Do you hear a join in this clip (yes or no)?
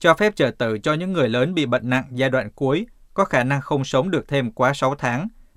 no